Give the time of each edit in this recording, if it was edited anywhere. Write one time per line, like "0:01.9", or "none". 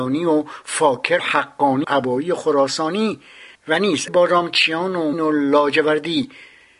0:01.2
0:01.8
0:03.5
0:04.1
0:05.1